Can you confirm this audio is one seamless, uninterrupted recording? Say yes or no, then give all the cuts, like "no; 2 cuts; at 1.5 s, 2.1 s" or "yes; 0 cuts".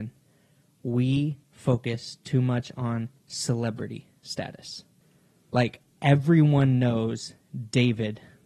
no; 3 cuts; at 1.4 s, 3.2 s, 5.0 s